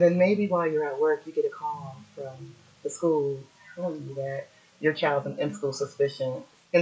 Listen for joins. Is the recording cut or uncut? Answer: uncut